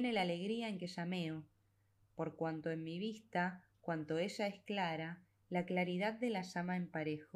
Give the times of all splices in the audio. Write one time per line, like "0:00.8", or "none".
none